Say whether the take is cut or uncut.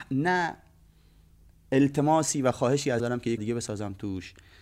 cut